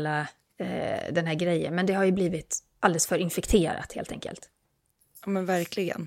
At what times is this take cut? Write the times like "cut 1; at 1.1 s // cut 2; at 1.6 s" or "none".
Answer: none